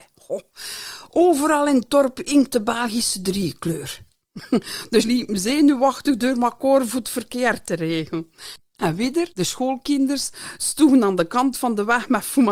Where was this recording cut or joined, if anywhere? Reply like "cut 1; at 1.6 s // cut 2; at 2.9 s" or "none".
cut 1; at 5.0 s // cut 2; at 9.3 s